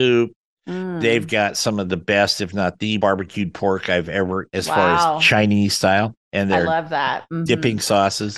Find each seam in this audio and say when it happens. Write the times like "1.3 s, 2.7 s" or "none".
3.0 s, 4.5 s